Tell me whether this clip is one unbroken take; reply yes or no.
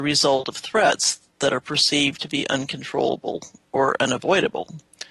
yes